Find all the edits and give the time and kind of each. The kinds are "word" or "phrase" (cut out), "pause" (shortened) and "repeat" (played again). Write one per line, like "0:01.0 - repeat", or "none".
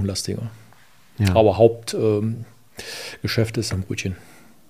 0:03.7 - phrase